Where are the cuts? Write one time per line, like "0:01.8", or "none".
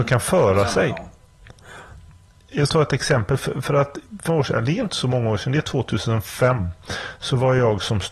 0:02.7
0:04.3